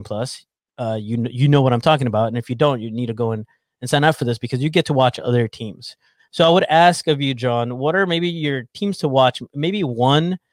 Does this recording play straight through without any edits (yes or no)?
yes